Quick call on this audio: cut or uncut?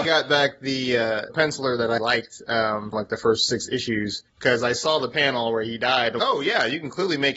cut